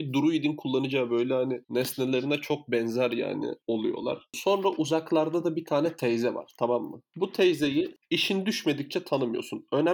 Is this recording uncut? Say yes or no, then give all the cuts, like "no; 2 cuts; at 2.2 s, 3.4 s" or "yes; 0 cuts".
no; 1 cut; at 1.6 s